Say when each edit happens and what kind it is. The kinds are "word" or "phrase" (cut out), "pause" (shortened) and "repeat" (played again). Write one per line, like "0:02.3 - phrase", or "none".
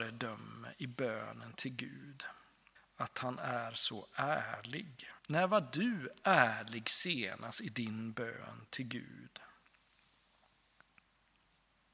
0:02.8 - pause
0:05.2 - pause